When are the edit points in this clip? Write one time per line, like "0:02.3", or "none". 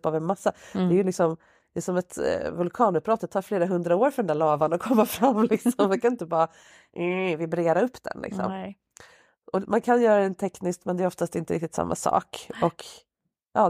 none